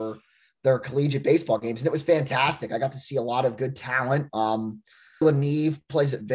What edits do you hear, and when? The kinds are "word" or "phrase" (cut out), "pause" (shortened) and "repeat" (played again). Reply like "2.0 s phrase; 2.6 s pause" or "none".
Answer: 5.2 s word